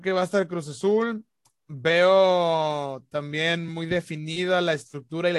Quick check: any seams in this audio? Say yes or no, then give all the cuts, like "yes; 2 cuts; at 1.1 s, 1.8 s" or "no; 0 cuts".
no; 0 cuts